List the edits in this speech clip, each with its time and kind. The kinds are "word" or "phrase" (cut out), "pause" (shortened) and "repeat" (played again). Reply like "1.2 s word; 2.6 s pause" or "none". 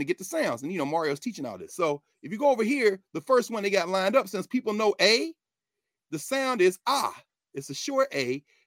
none